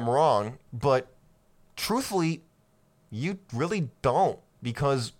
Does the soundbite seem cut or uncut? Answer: uncut